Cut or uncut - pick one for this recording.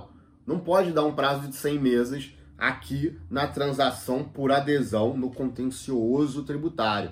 uncut